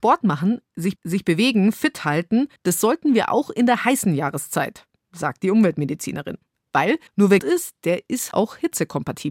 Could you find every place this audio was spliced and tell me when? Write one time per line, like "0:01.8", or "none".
0:01.0
0:02.6
0:07.1
0:07.4
0:08.3